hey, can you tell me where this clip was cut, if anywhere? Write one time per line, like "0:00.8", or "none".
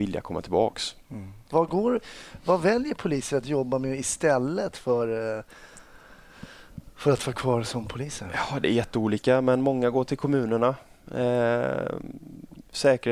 0:01.5